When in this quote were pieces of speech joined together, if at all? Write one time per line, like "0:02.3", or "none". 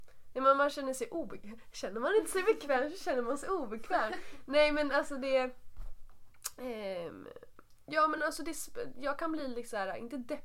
none